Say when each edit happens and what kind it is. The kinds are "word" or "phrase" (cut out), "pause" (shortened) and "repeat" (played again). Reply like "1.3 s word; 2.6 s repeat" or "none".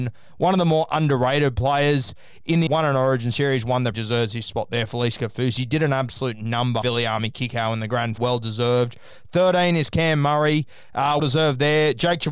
2.7 s word; 3.9 s phrase; 6.8 s word; 8.2 s word; 11.2 s word